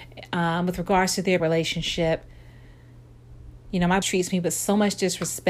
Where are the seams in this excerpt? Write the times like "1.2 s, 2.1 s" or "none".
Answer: 1.4 s, 4.0 s